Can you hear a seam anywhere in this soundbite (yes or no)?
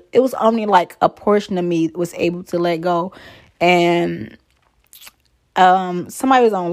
no